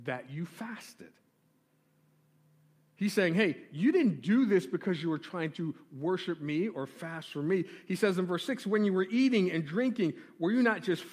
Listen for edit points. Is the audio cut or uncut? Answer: uncut